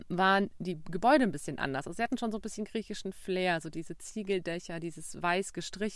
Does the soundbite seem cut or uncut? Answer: uncut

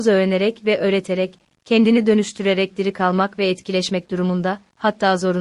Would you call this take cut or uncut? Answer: uncut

